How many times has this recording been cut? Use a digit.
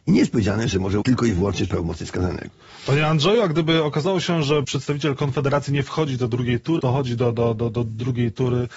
4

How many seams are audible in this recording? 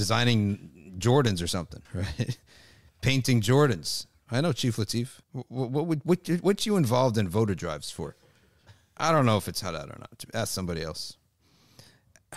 2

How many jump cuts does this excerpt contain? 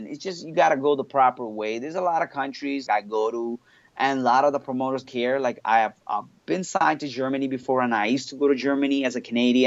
2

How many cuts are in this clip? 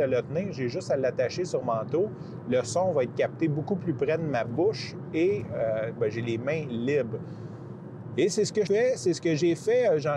3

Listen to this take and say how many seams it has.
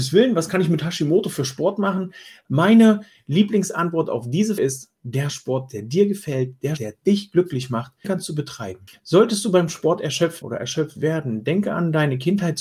4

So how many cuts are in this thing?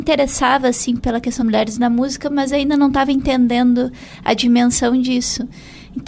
1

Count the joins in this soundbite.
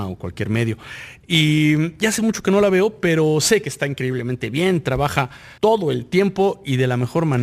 1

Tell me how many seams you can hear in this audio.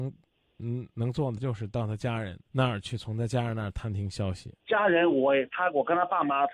3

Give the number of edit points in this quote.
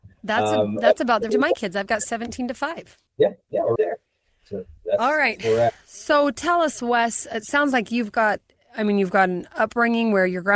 3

